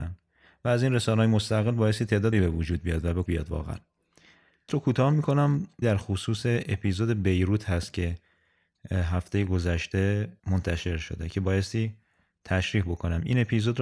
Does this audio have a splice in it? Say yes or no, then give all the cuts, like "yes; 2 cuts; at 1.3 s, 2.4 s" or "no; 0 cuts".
yes; 5 cuts; at 2.3 s, 3.3 s, 4.7 s, 5.8 s, 10.4 s